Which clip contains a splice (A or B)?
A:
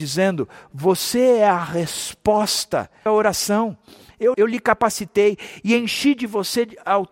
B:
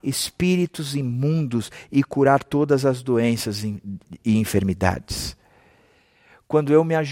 A